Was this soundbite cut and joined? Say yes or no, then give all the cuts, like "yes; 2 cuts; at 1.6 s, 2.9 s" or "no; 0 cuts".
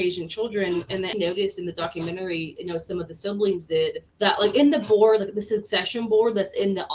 yes; 2 cuts; at 1.1 s, 4.1 s